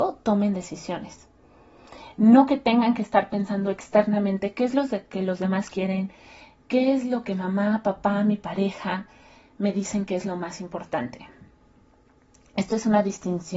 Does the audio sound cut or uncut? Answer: uncut